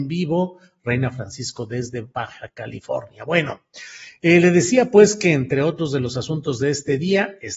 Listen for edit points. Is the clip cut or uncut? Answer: uncut